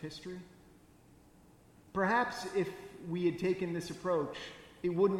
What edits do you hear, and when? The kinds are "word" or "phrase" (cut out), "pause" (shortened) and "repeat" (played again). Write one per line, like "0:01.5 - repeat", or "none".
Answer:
none